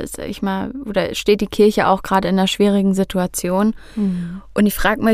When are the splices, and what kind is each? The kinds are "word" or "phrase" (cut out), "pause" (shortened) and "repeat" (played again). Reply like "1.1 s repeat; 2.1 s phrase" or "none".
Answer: none